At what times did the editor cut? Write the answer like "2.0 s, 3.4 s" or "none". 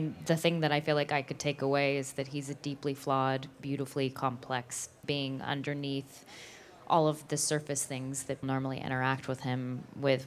5.0 s, 8.4 s